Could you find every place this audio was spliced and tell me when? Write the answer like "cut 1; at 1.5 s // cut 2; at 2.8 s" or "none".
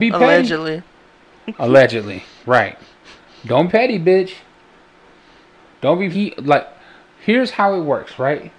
cut 1; at 3.7 s // cut 2; at 6.1 s